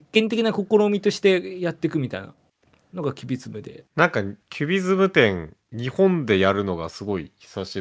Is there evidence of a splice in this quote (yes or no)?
yes